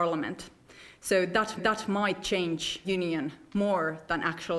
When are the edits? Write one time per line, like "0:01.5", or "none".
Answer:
0:01.6
0:02.8